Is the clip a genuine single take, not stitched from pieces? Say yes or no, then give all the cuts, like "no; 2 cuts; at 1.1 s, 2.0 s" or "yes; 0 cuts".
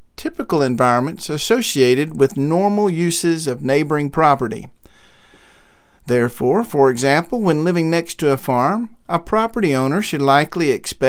yes; 0 cuts